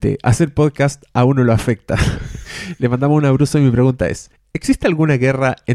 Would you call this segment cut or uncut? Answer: uncut